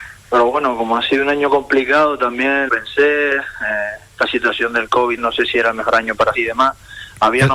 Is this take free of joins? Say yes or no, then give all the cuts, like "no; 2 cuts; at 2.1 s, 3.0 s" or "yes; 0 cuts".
no; 3 cuts; at 2.7 s, 5.2 s, 6.3 s